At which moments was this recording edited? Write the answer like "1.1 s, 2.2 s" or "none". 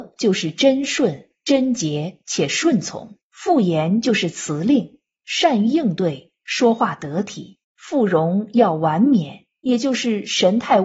3.2 s, 7.6 s